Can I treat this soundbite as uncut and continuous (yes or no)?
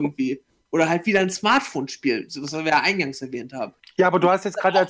yes